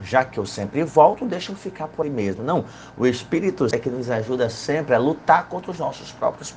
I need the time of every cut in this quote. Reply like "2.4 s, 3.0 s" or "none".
2.0 s, 3.7 s